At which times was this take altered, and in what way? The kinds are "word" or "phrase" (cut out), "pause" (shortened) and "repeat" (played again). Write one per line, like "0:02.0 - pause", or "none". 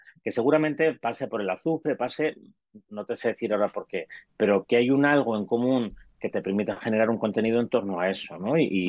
0:04.6 - word

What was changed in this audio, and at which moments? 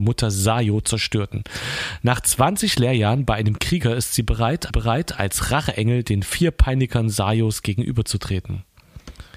0:04.7 - repeat

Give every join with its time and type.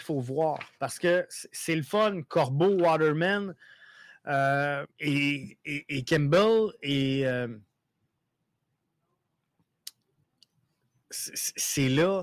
0:04.9 - pause

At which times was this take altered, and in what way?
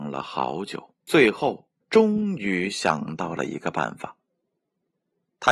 0:01.0 - pause
0:01.8 - pause

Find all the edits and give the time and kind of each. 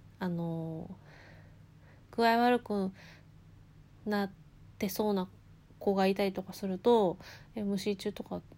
none

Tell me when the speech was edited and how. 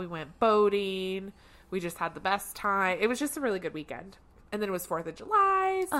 none

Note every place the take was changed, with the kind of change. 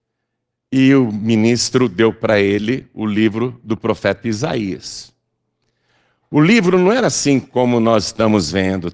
none

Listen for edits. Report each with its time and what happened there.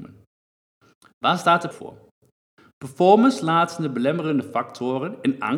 0:01.7 - word

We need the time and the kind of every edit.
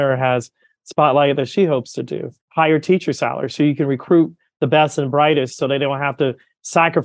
none

